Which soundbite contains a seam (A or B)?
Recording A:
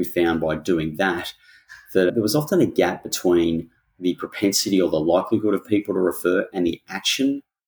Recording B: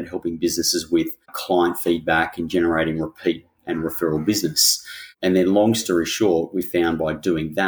B